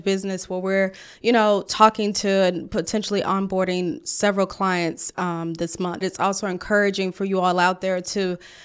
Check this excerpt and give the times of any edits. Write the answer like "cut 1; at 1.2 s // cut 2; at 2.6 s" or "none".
cut 1; at 6.0 s